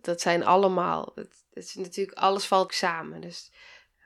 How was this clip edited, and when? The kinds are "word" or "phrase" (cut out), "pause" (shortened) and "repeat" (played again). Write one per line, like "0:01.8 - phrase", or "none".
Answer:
0:01.5 - word
0:02.7 - phrase